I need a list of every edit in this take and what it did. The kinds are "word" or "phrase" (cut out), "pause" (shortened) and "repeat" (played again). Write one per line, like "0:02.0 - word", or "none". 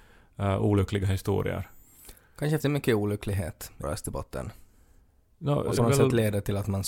0:02.6 - word
0:03.8 - word
0:05.8 - word

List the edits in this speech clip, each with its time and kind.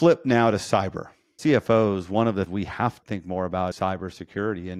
0:01.4 - word
0:02.5 - word
0:03.0 - word
0:03.7 - word

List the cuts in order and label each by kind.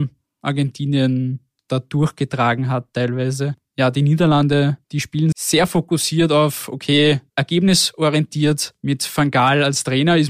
0:01.6 - pause
0:03.6 - pause
0:04.8 - pause
0:05.3 - word
0:07.3 - pause

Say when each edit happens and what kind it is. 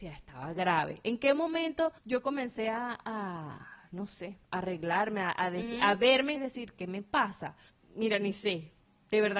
0:02.0 - pause
0:04.4 - pause
0:06.3 - phrase
0:07.7 - pause

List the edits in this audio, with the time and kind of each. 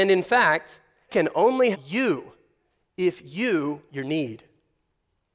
0:01.1 - word
0:01.7 - word
0:03.9 - word

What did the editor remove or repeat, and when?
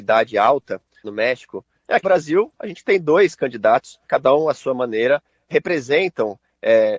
0:01.0 - word
0:02.0 - word
0:04.1 - word

